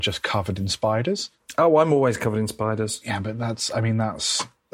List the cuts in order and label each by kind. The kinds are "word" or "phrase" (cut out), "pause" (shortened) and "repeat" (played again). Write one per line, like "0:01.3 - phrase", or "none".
none